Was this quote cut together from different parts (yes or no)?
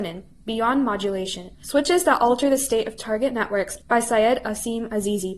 yes